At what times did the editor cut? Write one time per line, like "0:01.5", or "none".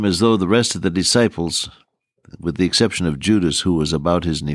none